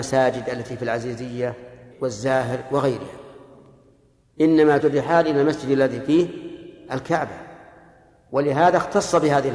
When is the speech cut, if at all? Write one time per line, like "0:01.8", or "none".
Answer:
0:01.9
0:04.8